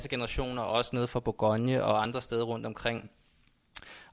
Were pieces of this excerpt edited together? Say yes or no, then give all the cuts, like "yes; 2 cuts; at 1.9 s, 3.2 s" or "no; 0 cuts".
no; 0 cuts